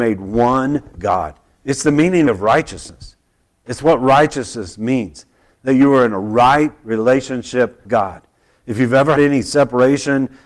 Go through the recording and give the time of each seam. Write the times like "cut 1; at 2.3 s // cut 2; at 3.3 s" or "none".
cut 1; at 1.0 s // cut 2; at 2.3 s // cut 3; at 7.9 s // cut 4; at 9.2 s

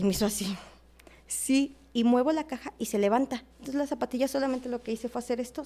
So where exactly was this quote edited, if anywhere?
cut 1; at 3.5 s

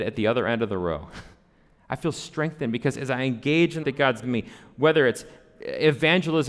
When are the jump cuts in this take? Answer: cut 1; at 3.8 s // cut 2; at 4.2 s

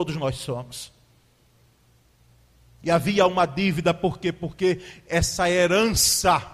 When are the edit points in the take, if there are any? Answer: none

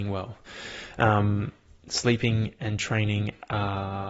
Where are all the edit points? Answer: none

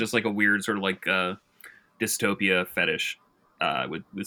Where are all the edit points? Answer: none

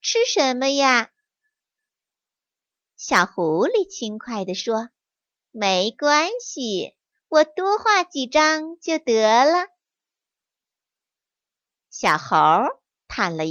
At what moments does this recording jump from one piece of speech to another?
none

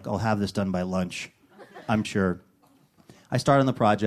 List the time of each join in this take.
cut 1; at 2.0 s

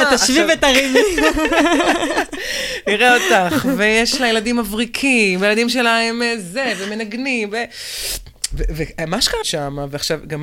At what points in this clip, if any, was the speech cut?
cut 1; at 9.4 s

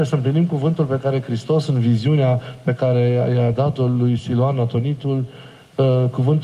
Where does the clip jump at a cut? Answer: none

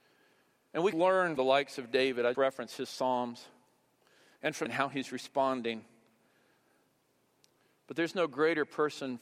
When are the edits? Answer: cut 1; at 0.9 s // cut 2; at 1.4 s // cut 3; at 2.3 s // cut 4; at 4.7 s

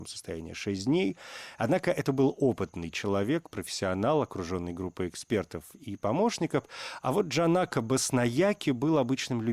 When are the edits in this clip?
none

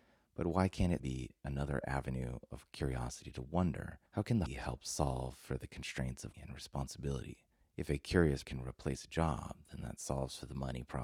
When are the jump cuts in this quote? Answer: cut 1; at 1.0 s // cut 2; at 4.1 s // cut 3; at 4.5 s // cut 4; at 6.3 s // cut 5; at 7.5 s // cut 6; at 8.4 s

